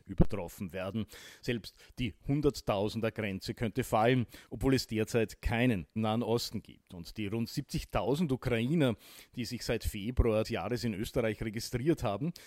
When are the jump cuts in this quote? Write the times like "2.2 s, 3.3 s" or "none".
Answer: 4.5 s, 6.0 s, 10.4 s